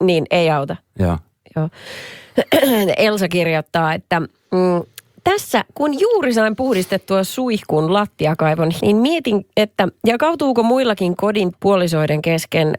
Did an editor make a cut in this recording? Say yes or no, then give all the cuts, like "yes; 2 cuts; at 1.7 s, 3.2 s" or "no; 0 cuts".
yes; 2 cuts; at 8.8 s, 11.5 s